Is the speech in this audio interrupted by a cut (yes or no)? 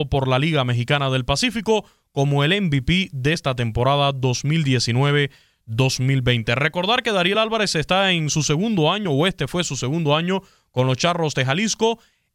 no